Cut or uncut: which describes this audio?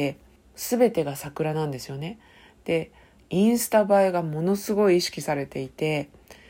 uncut